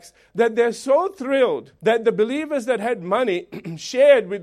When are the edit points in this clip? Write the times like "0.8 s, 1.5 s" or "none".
1.8 s